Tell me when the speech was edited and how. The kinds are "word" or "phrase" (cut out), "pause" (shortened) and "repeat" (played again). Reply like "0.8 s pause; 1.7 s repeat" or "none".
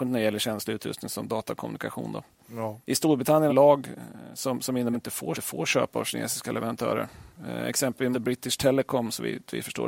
2.8 s pause; 3.5 s phrase; 4.9 s phrase; 5.3 s repeat; 8.1 s word